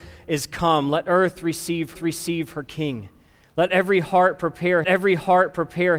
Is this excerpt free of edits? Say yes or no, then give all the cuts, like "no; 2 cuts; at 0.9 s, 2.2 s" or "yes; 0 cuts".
no; 2 cuts; at 1.9 s, 4.8 s